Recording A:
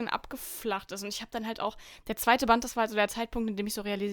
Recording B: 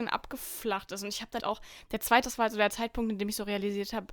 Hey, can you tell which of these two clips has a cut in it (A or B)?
B